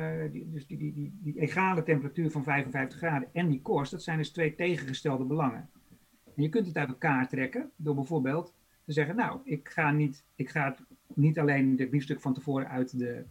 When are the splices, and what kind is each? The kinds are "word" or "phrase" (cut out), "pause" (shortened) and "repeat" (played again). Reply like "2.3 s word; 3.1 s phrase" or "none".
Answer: none